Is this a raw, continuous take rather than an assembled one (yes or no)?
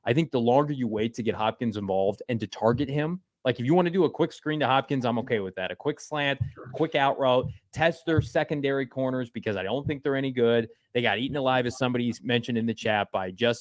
yes